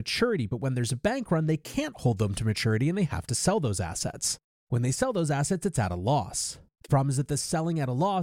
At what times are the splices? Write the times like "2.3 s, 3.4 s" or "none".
none